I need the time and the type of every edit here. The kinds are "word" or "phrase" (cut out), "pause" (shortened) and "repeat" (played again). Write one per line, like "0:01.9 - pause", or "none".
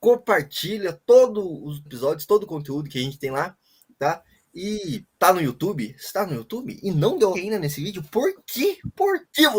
0:01.9 - phrase
0:05.1 - pause
0:07.3 - word